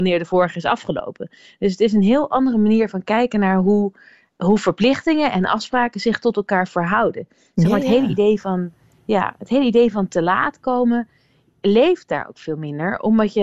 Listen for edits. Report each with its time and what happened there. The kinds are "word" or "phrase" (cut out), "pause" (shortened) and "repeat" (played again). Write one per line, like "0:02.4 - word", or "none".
none